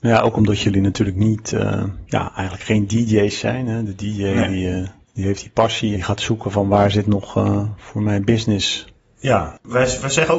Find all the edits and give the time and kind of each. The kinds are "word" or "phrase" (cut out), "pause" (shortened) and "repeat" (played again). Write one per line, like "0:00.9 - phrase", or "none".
0:05.9 - phrase